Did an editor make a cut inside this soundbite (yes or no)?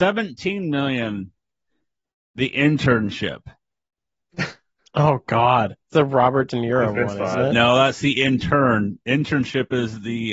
yes